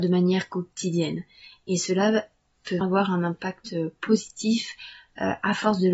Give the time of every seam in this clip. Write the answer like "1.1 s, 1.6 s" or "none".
2.8 s